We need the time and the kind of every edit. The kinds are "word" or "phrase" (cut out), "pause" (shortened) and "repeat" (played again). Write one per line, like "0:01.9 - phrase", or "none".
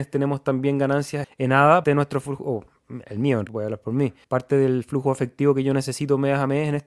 0:01.2 - word
0:01.8 - word
0:03.5 - word
0:04.2 - pause